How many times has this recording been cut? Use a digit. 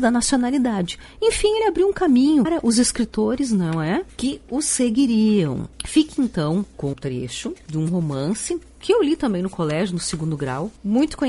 2